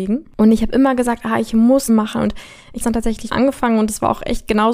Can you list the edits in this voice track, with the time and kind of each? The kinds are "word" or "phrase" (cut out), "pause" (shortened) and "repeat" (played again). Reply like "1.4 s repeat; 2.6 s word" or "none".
1.9 s phrase; 2.8 s word; 3.3 s word